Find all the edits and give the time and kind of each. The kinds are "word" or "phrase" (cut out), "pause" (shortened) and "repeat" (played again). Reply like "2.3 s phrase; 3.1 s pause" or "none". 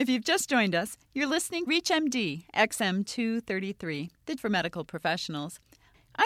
1.7 s word; 4.4 s word